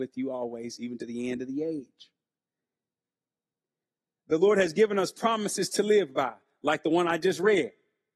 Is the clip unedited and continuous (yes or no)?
yes